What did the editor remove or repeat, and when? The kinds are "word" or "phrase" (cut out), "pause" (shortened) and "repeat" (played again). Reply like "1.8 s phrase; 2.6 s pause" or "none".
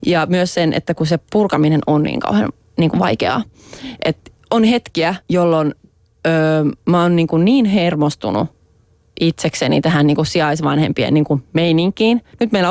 5.2 s pause